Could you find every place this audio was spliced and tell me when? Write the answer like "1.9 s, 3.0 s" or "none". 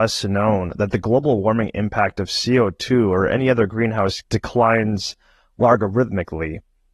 4.2 s